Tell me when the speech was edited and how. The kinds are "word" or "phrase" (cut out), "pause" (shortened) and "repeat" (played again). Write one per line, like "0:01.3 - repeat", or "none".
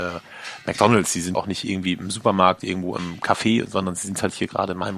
0:01.3 - word